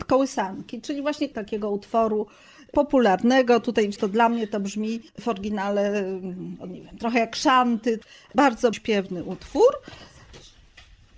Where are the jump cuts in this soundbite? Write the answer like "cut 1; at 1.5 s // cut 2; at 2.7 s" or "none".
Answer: cut 1; at 4.0 s // cut 2; at 5.1 s // cut 3; at 8.7 s

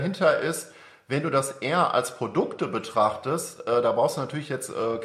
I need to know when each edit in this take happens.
none

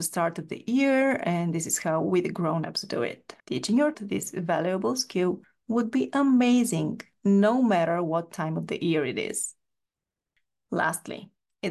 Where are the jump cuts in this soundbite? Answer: cut 1; at 3.4 s // cut 2; at 3.9 s

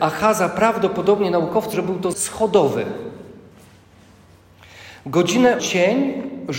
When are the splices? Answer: cut 1; at 1.7 s // cut 2; at 2.1 s // cut 3; at 5.6 s

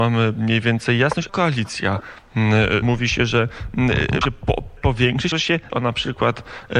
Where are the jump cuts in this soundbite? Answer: cut 1; at 1.3 s // cut 2; at 2.8 s // cut 3; at 4.2 s // cut 4; at 4.8 s // cut 5; at 5.3 s // cut 6; at 5.7 s

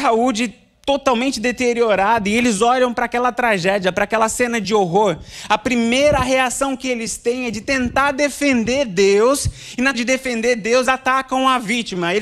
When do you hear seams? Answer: cut 1; at 9.9 s // cut 2; at 10.9 s

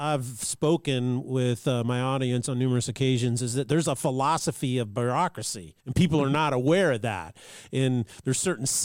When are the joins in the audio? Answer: cut 1; at 5.8 s

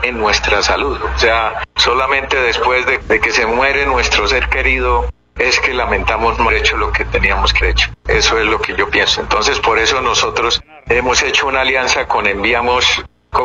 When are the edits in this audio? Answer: cut 1; at 1.7 s // cut 2; at 3.0 s // cut 3; at 6.5 s // cut 4; at 7.6 s // cut 5; at 8.0 s

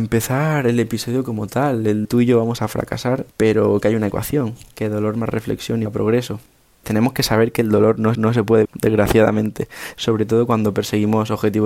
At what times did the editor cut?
cut 1; at 2.0 s // cut 2; at 3.3 s // cut 3; at 5.9 s // cut 4; at 6.8 s // cut 5; at 8.1 s // cut 6; at 8.6 s

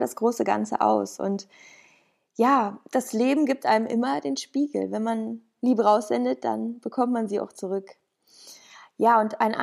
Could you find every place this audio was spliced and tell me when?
none

